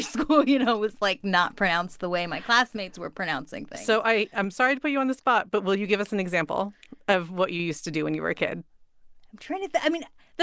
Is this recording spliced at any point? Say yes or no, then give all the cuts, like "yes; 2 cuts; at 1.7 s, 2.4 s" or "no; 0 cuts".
no; 0 cuts